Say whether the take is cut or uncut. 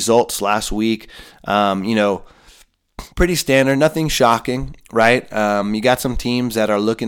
cut